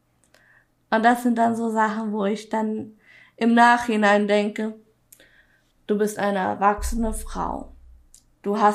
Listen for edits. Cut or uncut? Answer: uncut